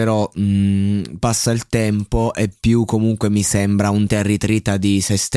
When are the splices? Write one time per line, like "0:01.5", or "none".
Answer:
0:01.2
0:04.1

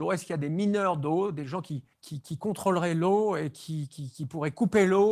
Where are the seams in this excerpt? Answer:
0:01.9

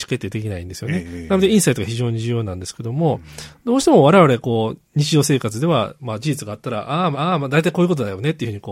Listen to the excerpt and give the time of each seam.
0:07.1

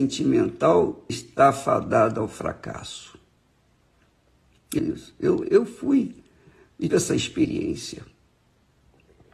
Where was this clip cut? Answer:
0:01.1
0:04.8
0:05.4
0:06.9

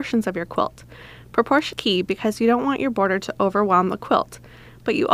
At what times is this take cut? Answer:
0:01.7

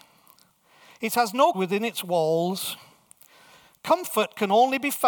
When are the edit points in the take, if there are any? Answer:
0:01.5

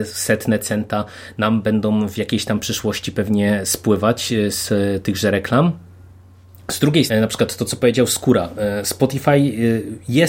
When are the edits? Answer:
0:07.1

